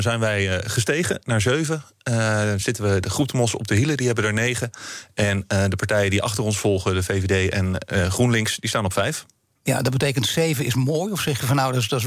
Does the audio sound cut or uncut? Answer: uncut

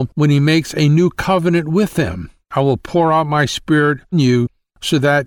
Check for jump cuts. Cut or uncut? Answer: cut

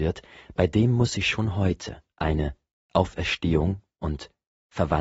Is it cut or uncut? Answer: uncut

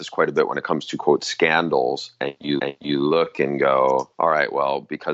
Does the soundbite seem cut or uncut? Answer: cut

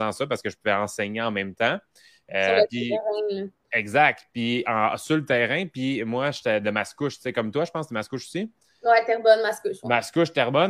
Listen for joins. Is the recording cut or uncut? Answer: uncut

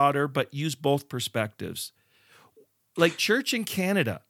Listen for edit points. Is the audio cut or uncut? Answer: uncut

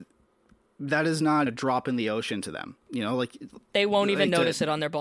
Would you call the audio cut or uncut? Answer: cut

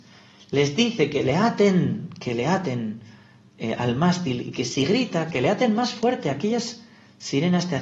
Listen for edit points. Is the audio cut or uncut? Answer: uncut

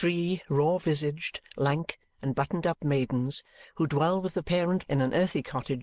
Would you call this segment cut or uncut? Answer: cut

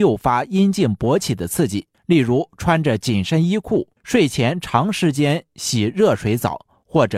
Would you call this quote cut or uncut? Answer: cut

